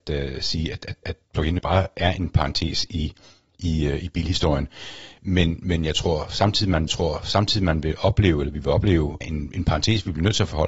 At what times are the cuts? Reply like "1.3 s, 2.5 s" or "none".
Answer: 1.0 s, 1.6 s, 6.9 s, 9.2 s